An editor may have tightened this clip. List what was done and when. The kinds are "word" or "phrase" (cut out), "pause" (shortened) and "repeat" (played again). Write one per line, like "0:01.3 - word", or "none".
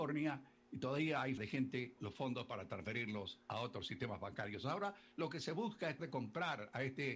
0:01.4 - word
0:02.0 - word
0:06.0 - word